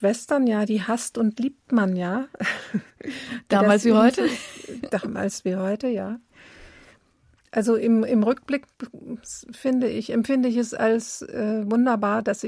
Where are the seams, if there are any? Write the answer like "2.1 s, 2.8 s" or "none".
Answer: 2.9 s